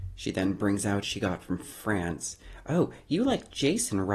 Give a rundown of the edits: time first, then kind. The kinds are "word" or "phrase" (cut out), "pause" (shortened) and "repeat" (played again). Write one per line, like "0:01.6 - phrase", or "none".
0:01.0 - phrase